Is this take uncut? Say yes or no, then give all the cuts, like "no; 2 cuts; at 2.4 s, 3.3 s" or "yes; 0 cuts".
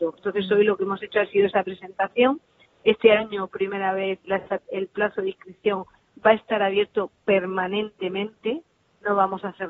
no; 2 cuts; at 3.5 s, 4.2 s